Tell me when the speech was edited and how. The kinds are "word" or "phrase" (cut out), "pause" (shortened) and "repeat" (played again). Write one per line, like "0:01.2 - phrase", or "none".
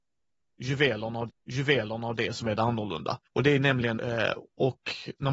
0:01.3 - repeat
0:03.3 - pause
0:04.0 - phrase